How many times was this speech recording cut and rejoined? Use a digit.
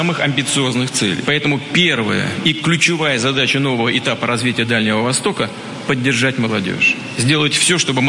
0